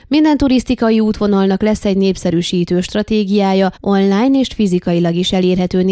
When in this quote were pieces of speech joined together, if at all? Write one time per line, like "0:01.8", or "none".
0:03.8